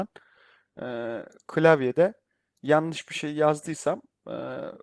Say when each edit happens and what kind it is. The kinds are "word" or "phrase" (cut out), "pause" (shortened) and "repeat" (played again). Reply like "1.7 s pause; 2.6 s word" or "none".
none